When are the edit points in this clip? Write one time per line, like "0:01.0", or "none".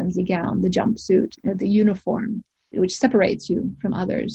0:01.4

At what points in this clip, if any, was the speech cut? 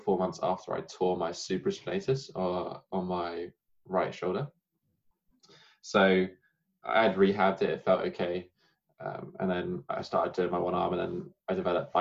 none

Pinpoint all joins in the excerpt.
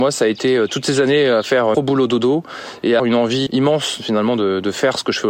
0:01.7
0:03.0
0:03.5

